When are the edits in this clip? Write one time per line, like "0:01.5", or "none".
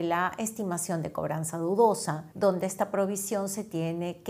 0:02.3